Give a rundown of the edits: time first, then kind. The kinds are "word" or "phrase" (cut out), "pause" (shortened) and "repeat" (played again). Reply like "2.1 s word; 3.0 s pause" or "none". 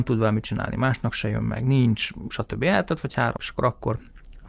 3.4 s word

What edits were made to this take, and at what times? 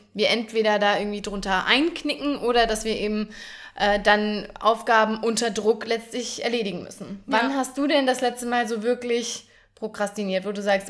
none

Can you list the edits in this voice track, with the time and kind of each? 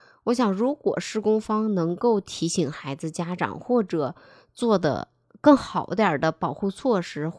none

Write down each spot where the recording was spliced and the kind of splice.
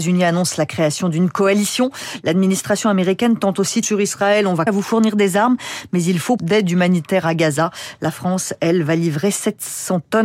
3.8 s phrase; 4.7 s word; 6.4 s word

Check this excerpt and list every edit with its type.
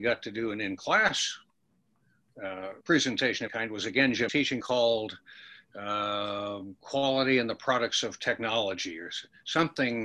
2.8 s pause; 3.5 s word; 4.3 s phrase; 4.6 s word

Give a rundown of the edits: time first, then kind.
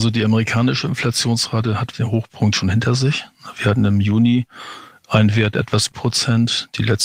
1.9 s word; 5.9 s word

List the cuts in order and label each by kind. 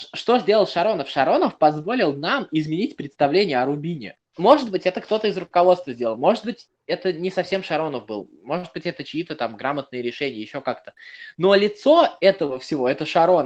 4.3 s pause

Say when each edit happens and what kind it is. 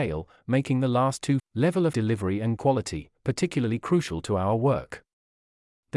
1.4 s word; 1.9 s word; 2.6 s word

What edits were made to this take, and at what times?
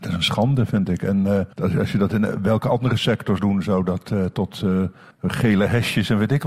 1.5 s pause; 3.4 s word; 5.1 s pause

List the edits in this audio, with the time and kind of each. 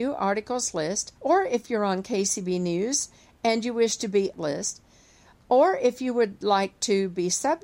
1.2 s pause; 4.3 s phrase

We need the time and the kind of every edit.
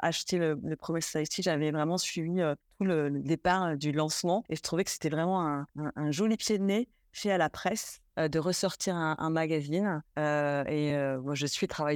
none

